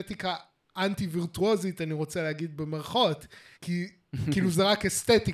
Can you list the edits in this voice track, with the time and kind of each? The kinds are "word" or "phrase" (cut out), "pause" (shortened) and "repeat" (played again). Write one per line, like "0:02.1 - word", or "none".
0:03.5 - pause